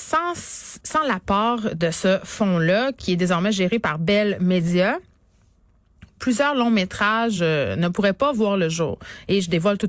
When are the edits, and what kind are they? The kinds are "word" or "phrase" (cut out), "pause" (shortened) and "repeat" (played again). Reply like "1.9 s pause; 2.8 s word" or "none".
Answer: none